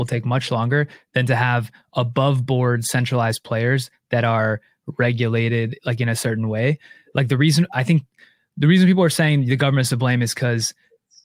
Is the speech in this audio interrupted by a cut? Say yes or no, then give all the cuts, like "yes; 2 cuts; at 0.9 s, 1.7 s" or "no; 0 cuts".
no; 0 cuts